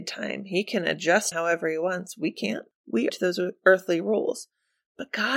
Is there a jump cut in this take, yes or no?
yes